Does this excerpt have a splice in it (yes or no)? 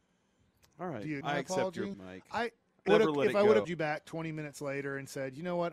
yes